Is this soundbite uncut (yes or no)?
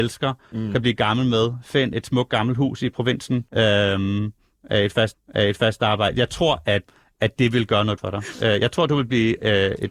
no